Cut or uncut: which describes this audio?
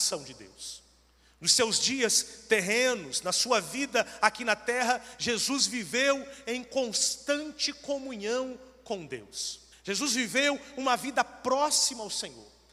cut